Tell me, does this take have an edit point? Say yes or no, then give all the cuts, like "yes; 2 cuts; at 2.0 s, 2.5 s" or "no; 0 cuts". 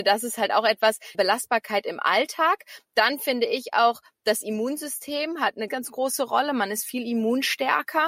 yes; 2 cuts; at 1.1 s, 5.7 s